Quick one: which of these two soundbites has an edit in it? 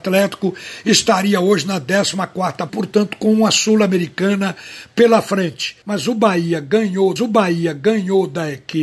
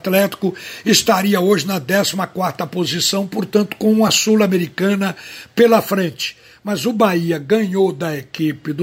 first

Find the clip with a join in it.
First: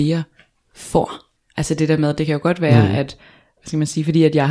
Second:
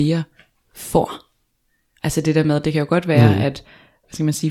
first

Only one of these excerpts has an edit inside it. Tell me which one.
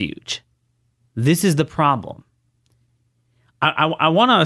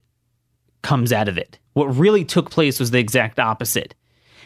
second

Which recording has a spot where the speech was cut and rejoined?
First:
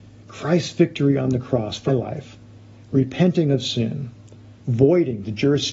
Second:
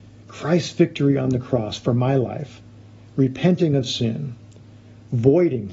first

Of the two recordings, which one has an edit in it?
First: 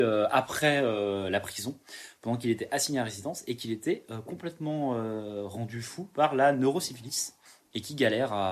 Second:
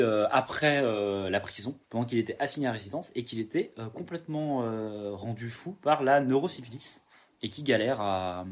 second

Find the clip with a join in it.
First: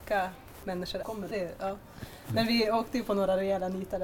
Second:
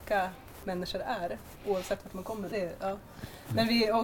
first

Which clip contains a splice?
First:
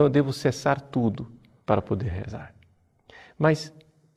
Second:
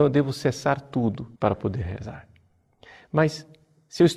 second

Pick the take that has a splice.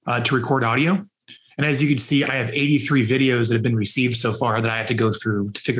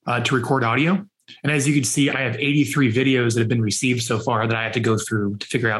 second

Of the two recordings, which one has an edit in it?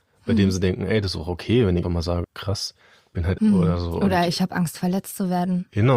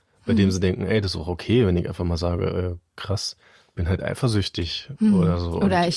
first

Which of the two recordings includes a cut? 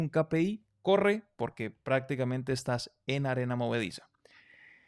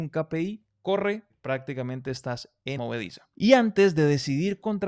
second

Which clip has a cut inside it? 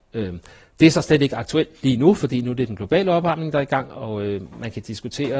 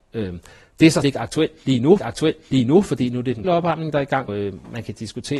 second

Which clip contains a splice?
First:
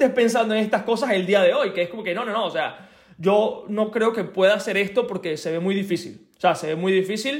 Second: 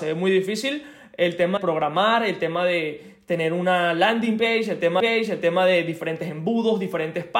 second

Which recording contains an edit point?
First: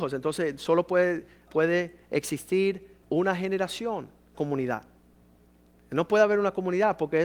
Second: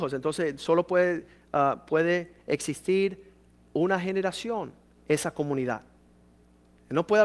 first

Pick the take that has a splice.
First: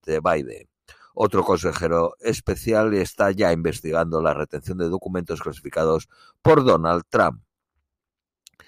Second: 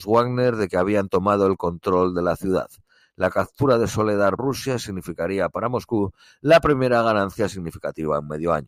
second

